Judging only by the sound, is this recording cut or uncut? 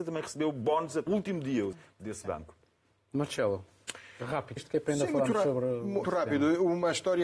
cut